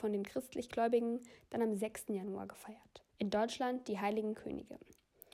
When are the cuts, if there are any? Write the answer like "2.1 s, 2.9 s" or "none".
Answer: 3.1 s, 4.3 s